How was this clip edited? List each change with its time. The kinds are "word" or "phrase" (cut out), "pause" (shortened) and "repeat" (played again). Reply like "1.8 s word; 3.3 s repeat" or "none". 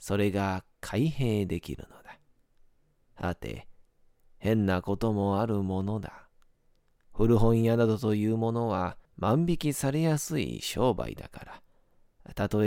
9.0 s pause